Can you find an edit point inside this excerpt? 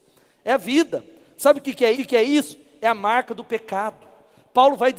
yes; 1 cut; at 1.9 s

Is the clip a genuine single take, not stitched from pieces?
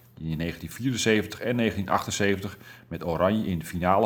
yes; 0 cuts

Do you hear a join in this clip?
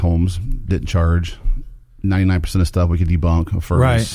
no; 0 cuts

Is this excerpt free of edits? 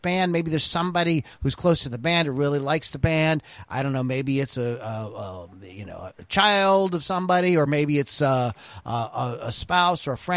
yes; 0 cuts

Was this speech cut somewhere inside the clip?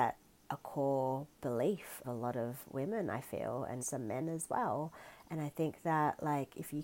yes; 2 cuts; at 2.0 s, 3.8 s

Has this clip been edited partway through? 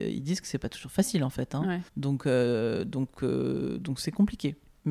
yes; 1 cut; at 1.9 s

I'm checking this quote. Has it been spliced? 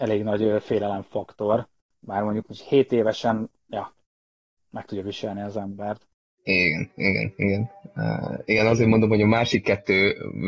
no; 0 cuts

